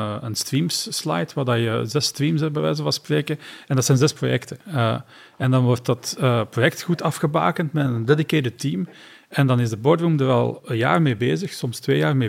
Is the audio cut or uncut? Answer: uncut